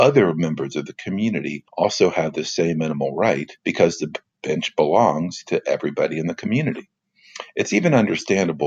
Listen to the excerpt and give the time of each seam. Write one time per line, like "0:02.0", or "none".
0:01.7
0:03.6

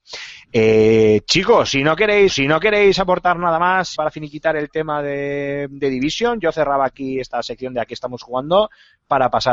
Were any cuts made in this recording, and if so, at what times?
0:02.3
0:04.0

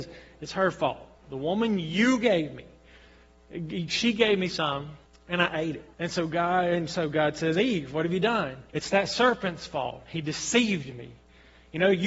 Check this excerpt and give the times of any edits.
0:01.2
0:05.1
0:05.9
0:08.7

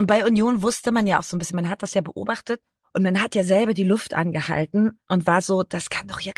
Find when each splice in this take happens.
0:02.8

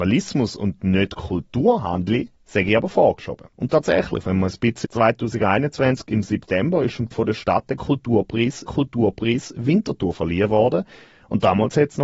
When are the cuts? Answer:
0:02.4
0:03.5
0:04.8
0:07.1
0:08.7

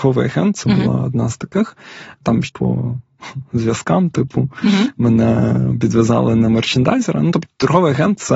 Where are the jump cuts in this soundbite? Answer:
0:02.4

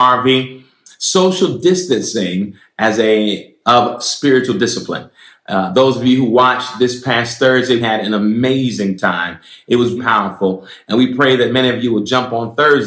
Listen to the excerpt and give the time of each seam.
0:03.6
0:07.8
0:10.0

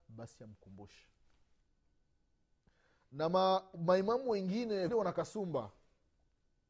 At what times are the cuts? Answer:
0:04.9

